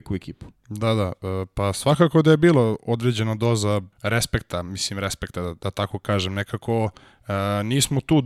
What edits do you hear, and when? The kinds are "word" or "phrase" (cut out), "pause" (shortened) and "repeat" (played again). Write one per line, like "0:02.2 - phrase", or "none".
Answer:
0:03.9 - pause

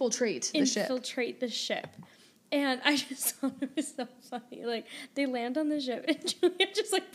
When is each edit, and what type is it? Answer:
none

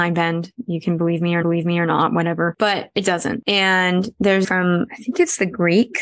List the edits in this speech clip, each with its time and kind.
0:01.4 - repeat
0:04.4 - phrase

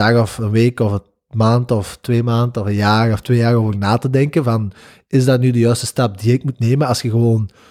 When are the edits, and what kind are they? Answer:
none

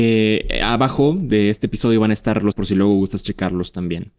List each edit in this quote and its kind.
0:02.5 - word

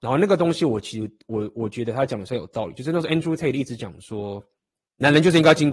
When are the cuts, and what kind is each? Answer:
0:04.6 - pause

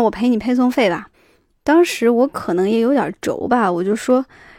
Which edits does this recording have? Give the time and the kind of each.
0:01.1 - pause

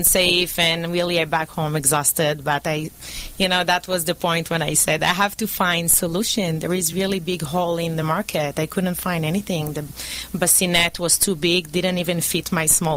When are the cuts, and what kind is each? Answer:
none

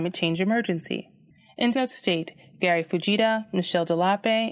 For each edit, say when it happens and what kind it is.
0:01.7 - word

